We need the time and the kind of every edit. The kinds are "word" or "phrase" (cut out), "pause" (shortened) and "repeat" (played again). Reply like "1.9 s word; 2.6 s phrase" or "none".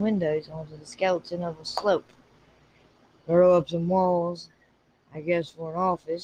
none